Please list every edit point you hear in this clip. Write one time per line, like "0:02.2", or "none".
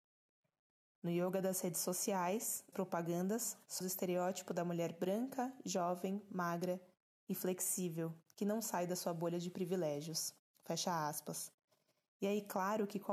0:02.7
0:03.8